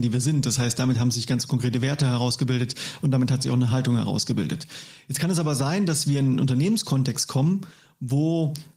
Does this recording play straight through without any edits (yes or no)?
yes